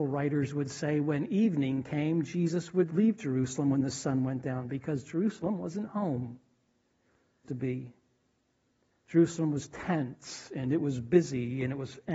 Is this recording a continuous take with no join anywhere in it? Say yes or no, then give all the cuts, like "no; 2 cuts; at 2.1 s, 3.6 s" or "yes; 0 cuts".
no; 2 cuts; at 2.9 s, 7.4 s